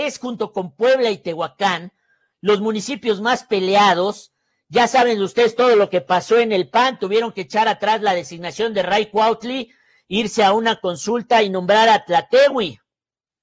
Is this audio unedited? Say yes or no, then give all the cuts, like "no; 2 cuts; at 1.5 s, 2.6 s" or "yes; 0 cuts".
yes; 0 cuts